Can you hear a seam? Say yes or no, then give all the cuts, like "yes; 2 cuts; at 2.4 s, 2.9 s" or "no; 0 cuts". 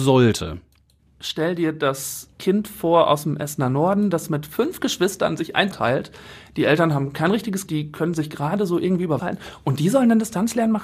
yes; 4 cuts; at 2.3 s, 5.7 s, 7.7 s, 9.2 s